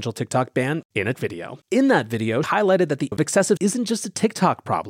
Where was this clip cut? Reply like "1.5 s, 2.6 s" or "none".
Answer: 1.1 s, 1.6 s, 2.4 s, 3.1 s, 3.6 s